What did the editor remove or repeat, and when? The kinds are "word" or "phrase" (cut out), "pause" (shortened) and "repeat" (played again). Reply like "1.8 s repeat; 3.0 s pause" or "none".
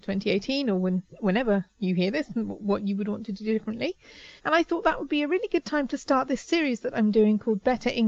4.4 s pause